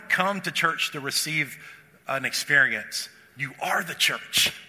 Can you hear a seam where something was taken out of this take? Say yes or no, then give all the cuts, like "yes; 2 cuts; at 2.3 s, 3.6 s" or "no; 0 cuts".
no; 0 cuts